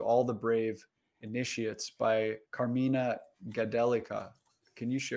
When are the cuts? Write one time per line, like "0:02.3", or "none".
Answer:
0:02.5